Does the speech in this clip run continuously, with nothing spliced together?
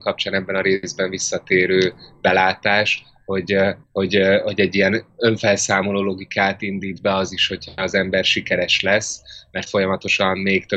no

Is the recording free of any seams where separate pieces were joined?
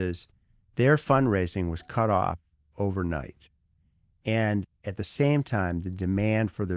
yes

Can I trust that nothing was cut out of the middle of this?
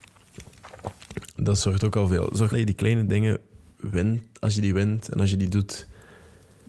no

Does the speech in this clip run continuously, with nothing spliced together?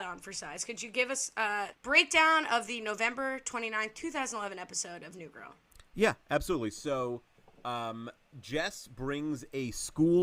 no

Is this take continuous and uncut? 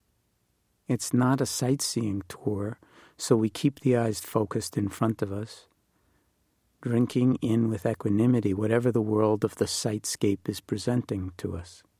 yes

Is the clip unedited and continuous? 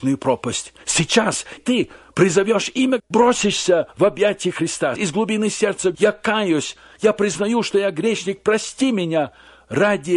no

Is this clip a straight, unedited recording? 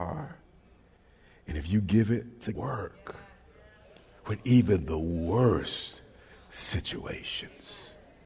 no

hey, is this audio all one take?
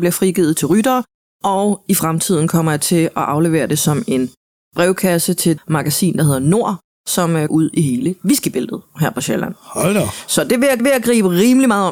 no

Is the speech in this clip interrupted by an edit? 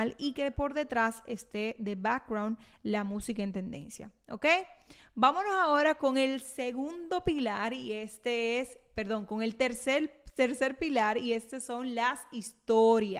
no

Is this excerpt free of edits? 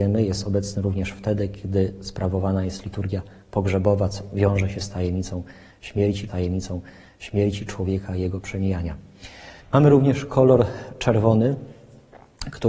no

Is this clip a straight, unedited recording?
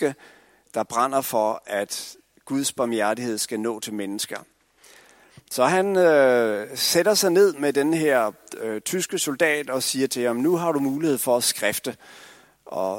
yes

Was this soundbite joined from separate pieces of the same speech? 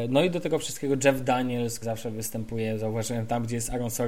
yes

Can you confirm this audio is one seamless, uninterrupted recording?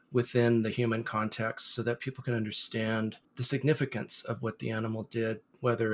no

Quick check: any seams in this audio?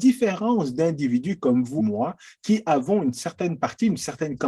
yes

